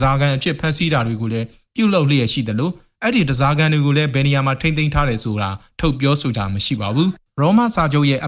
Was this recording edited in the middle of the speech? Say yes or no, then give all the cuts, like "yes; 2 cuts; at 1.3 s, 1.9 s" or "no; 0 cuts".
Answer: no; 0 cuts